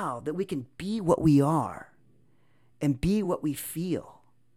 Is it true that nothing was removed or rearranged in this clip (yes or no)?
yes